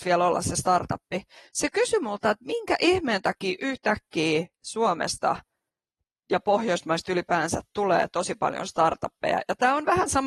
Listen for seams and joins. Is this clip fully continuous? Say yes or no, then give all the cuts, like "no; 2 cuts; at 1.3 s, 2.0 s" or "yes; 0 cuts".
yes; 0 cuts